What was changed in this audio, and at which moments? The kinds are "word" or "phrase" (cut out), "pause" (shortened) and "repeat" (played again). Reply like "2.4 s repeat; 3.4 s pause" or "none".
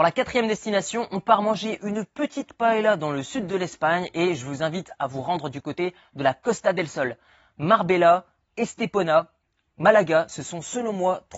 none